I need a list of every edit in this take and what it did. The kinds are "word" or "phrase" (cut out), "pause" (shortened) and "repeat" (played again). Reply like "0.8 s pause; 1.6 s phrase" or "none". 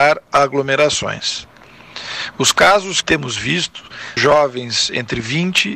3.0 s word; 4.2 s phrase